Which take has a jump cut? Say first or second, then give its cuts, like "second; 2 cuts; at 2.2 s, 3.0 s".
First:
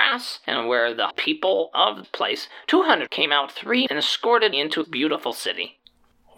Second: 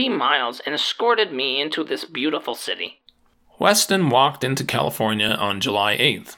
first; 6 cuts; at 1.1 s, 2.0 s, 3.1 s, 3.9 s, 4.5 s, 4.8 s